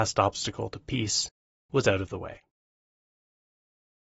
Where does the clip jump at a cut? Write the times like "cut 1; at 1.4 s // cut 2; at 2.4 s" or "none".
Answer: none